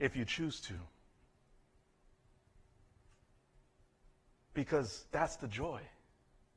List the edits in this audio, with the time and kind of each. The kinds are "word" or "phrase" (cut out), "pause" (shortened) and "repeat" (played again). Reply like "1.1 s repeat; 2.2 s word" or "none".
5.1 s pause